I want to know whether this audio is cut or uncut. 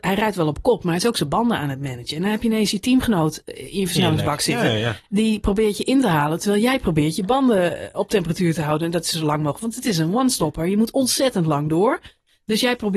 uncut